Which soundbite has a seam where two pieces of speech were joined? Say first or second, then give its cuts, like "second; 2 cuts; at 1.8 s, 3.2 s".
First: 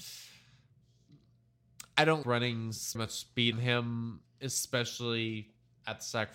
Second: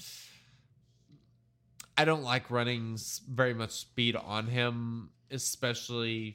first; 3 cuts; at 2.2 s, 2.9 s, 3.5 s